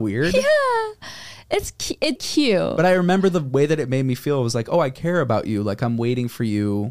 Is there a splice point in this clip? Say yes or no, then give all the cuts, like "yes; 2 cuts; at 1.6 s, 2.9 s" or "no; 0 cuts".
yes; 1 cut; at 2.2 s